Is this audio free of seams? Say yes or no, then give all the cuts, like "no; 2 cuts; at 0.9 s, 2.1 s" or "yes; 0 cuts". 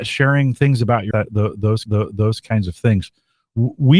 no; 2 cuts; at 1.1 s, 1.9 s